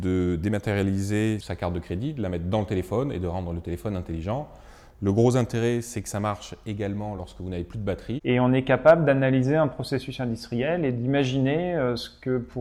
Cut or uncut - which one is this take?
uncut